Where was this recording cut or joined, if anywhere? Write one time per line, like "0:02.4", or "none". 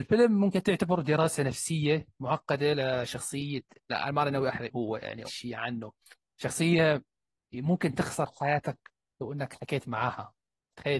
0:03.8
0:04.7
0:05.3

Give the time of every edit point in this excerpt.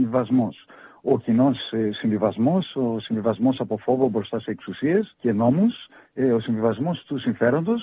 0:05.1

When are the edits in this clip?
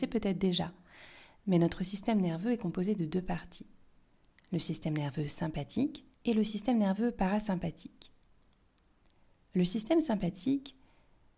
0:06.1

